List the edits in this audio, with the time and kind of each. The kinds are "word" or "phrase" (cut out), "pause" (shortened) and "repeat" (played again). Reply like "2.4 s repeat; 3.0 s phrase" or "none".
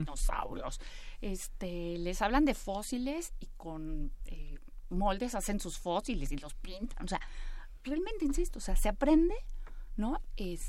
none